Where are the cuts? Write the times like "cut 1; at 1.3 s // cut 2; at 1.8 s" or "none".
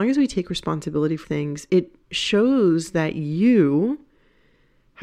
cut 1; at 1.2 s // cut 2; at 1.7 s // cut 3; at 2.0 s

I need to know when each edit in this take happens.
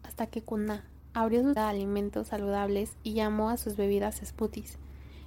cut 1; at 1.6 s

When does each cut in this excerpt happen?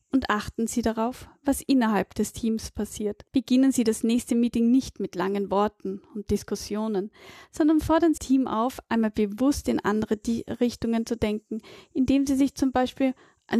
cut 1; at 3.3 s // cut 2; at 8.2 s

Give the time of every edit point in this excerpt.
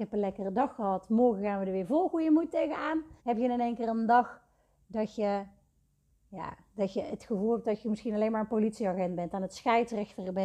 cut 1; at 3.2 s

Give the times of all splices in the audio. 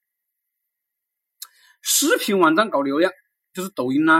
none

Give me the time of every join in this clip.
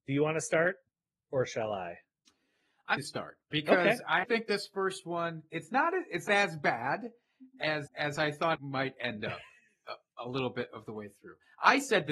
cut 1; at 3.0 s // cut 2; at 3.4 s // cut 3; at 4.2 s // cut 4; at 6.3 s // cut 5; at 7.9 s // cut 6; at 8.6 s

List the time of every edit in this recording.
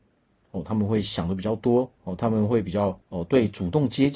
cut 1; at 2.0 s // cut 2; at 3.0 s

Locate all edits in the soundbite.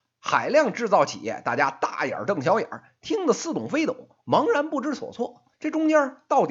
cut 1; at 5.5 s

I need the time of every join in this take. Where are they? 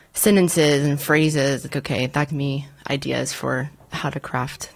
cut 1; at 1.7 s // cut 2; at 2.3 s

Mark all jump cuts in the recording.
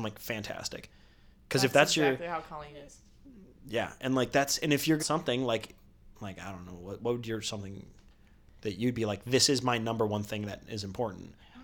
cut 1; at 5.0 s

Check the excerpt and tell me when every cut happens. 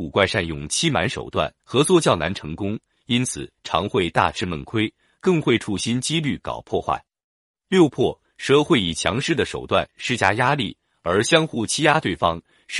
cut 1; at 1.6 s

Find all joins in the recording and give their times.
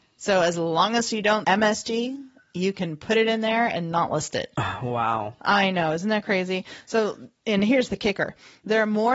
cut 1; at 1.4 s // cut 2; at 7.4 s

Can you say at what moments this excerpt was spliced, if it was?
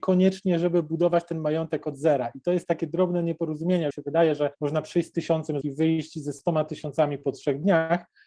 cut 1; at 3.9 s // cut 2; at 4.5 s // cut 3; at 5.6 s

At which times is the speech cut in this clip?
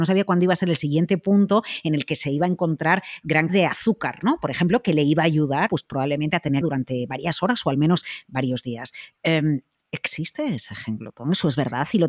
cut 1; at 3.5 s // cut 2; at 5.7 s // cut 3; at 6.6 s

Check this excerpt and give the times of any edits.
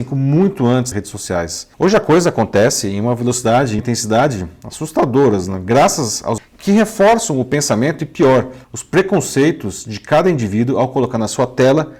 cut 1; at 0.9 s // cut 2; at 1.7 s // cut 3; at 3.8 s // cut 4; at 6.4 s // cut 5; at 8.6 s

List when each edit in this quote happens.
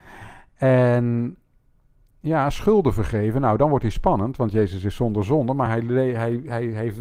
none

